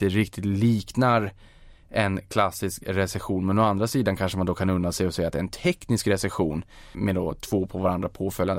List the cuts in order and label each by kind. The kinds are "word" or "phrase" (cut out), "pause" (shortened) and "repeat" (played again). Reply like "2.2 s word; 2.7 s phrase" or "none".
6.9 s word